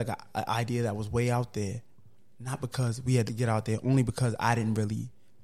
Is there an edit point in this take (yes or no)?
yes